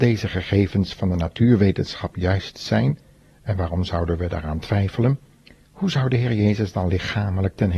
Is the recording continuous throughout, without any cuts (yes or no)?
yes